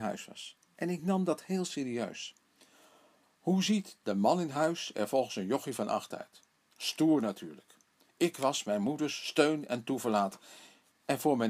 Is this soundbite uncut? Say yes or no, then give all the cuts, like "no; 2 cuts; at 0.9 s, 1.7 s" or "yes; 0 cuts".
yes; 0 cuts